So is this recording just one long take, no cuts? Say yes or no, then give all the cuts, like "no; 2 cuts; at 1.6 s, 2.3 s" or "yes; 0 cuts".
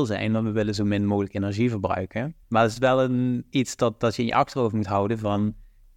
no; 1 cut; at 2.4 s